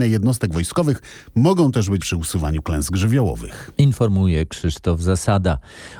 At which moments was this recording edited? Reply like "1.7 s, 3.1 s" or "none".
2.0 s

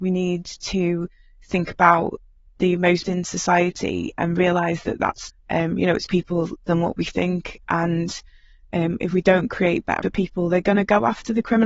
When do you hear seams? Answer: 3.0 s, 5.3 s, 6.1 s, 10.0 s

